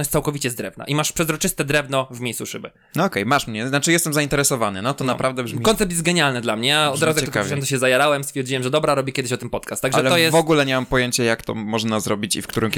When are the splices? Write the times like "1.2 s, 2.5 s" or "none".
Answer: none